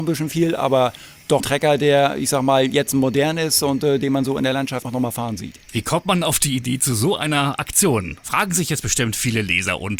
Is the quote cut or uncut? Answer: cut